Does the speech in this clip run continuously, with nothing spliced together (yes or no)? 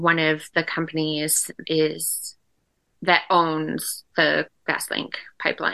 no